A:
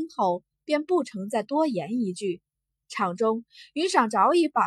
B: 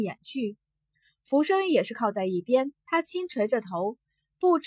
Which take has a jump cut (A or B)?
B